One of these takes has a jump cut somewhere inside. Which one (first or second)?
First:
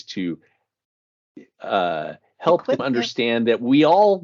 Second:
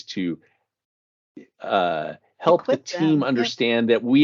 first